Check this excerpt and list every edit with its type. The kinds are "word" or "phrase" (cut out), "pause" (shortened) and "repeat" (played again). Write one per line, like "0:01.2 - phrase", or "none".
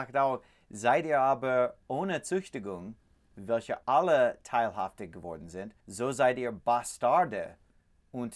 0:03.8 - pause
0:05.8 - pause